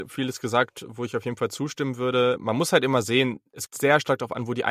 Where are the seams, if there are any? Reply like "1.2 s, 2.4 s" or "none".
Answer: 3.7 s